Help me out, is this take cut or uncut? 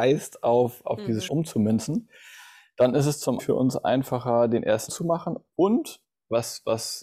cut